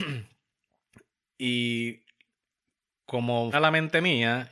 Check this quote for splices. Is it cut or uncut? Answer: cut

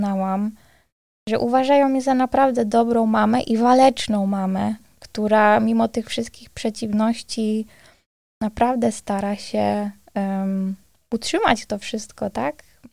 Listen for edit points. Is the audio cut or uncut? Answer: uncut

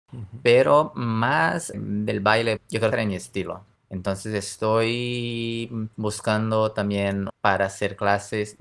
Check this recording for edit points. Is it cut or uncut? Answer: cut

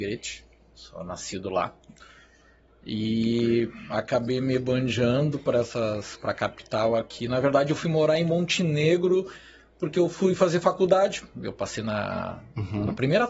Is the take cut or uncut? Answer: uncut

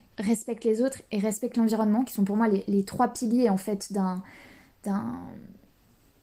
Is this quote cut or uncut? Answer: uncut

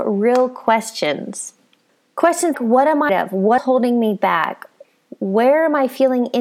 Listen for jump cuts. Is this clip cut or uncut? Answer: cut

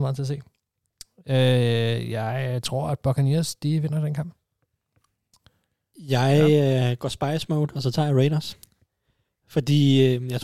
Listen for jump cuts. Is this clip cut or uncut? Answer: uncut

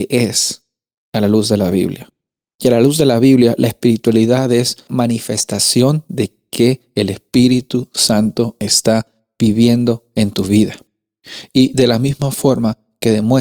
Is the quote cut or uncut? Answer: cut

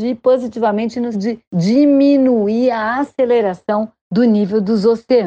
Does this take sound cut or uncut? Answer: cut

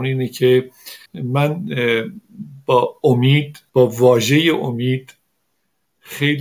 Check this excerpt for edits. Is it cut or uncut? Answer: cut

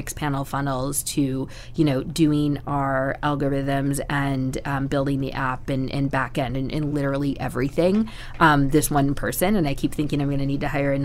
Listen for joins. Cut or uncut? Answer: uncut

